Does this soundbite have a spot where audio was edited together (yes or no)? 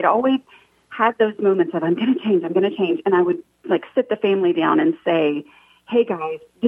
no